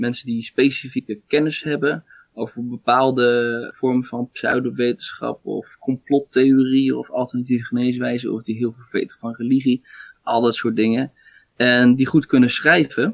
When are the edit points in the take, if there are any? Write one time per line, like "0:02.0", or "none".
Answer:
none